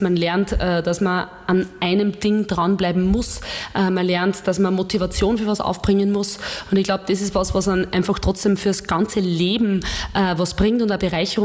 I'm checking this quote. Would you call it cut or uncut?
uncut